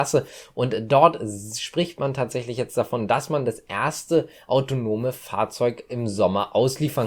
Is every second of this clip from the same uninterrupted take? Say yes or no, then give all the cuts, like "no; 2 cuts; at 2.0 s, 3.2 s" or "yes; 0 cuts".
yes; 0 cuts